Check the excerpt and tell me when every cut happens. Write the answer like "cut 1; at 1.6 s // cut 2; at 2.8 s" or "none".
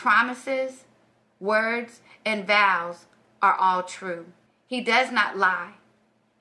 cut 1; at 4.5 s